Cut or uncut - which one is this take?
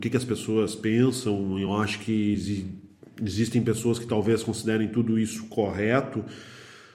uncut